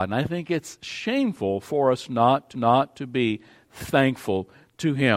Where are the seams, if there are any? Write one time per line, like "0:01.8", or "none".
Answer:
0:02.5